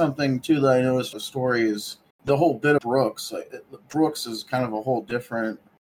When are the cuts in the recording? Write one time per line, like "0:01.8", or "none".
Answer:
0:01.1
0:02.1
0:02.8